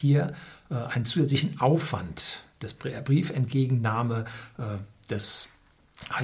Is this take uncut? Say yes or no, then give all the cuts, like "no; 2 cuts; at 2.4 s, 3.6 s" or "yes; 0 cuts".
yes; 0 cuts